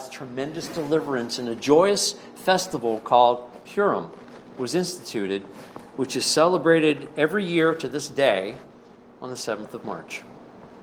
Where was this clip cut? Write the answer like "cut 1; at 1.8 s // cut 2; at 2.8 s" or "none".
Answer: none